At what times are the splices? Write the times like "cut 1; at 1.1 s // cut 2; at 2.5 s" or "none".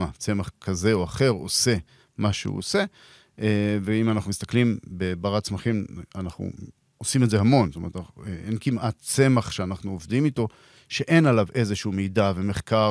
none